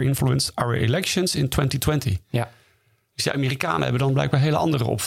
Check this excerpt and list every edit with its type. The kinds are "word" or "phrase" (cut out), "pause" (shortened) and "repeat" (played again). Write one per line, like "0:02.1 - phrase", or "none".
none